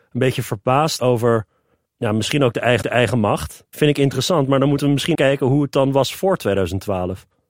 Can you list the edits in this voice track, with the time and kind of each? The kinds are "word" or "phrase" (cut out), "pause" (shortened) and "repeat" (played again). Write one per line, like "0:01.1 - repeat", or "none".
0:01.0 - word
0:01.9 - pause
0:02.8 - repeat
0:05.1 - word